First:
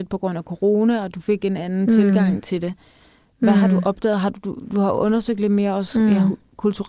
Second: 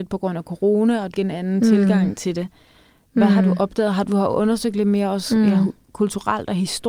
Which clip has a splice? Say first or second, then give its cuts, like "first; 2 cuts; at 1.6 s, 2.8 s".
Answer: second; 2 cuts; at 1.1 s, 4.0 s